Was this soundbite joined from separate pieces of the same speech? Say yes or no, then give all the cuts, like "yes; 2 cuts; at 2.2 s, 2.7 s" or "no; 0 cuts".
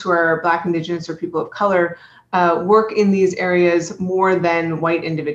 no; 0 cuts